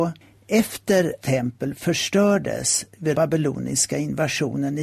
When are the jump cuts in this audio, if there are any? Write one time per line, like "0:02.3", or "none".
0:01.2
0:03.1